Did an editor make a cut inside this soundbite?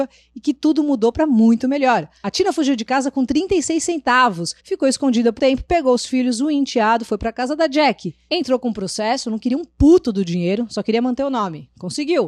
yes; 2 cuts; at 4.6 s, 5.4 s

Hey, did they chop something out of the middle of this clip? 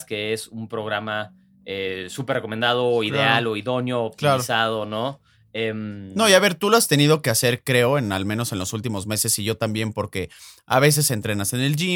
no; 0 cuts

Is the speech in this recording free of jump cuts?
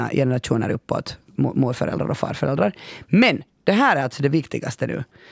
yes; 0 cuts

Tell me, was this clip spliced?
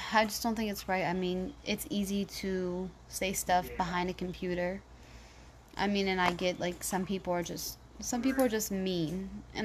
no; 0 cuts

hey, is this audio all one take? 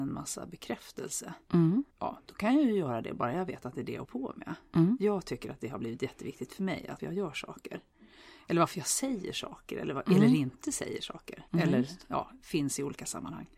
no; 4 cuts; at 1.9 s, 4.0 s, 7.0 s, 11.5 s

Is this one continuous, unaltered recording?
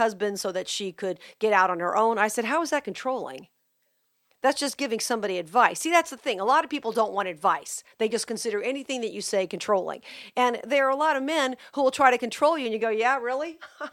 yes; 0 cuts

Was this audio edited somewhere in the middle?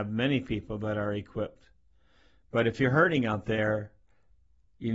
no; 0 cuts

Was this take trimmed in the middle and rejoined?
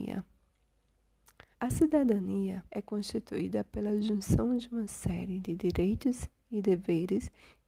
yes; 2 cuts; at 1.5 s, 2.7 s

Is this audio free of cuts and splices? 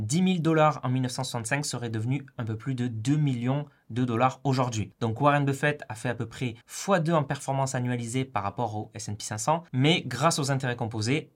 no; 2 cuts; at 6.6 s, 9.7 s

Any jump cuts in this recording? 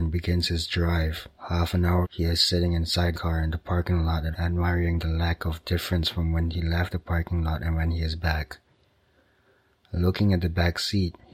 yes; 4 cuts; at 1.4 s, 2.0 s, 3.1 s, 4.3 s

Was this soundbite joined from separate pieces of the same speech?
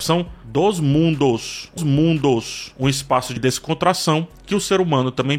yes; 2 cuts; at 1.8 s, 3.4 s

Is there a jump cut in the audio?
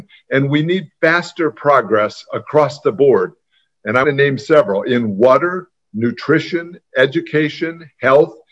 yes; 1 cut; at 4.0 s

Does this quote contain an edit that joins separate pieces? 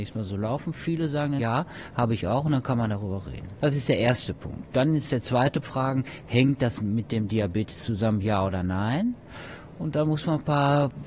yes; 2 cuts; at 1.4 s, 5.6 s

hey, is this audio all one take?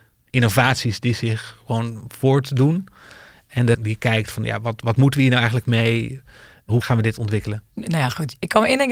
no; 1 cut; at 3.7 s

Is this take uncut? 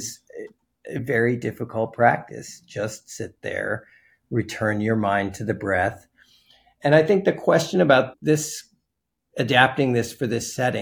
yes; 0 cuts

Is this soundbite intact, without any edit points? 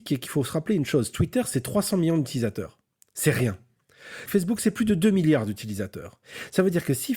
yes; 0 cuts

